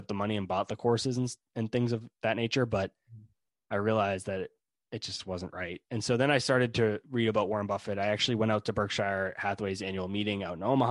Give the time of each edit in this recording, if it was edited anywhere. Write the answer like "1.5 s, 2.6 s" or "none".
none